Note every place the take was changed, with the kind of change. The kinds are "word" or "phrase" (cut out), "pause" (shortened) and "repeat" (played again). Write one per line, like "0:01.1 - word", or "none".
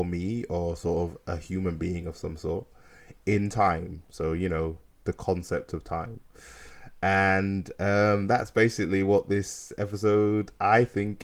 none